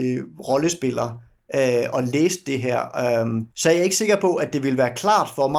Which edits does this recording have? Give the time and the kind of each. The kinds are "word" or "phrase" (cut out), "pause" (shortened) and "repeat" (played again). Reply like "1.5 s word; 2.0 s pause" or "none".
3.5 s pause